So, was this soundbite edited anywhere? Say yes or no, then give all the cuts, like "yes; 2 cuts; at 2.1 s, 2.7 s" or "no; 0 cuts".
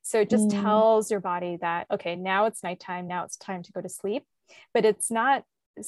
no; 0 cuts